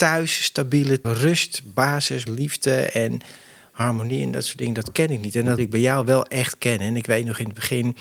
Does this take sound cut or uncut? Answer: cut